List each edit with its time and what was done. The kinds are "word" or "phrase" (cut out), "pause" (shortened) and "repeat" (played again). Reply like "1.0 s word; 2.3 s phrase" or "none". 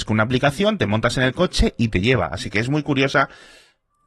none